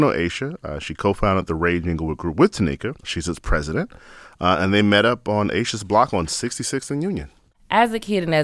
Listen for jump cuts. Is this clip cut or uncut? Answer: uncut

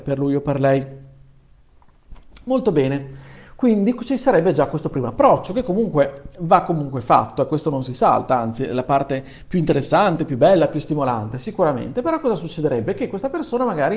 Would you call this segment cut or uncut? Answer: uncut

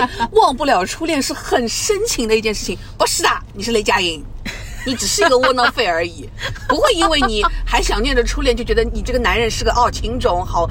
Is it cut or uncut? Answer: uncut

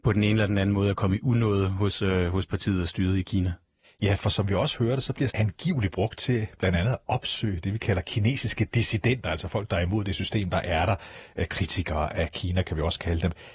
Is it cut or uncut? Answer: cut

